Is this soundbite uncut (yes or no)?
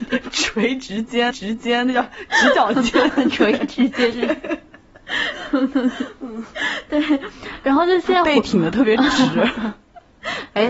no